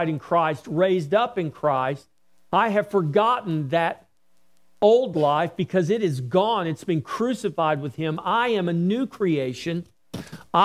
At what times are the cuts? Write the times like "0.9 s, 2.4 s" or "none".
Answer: none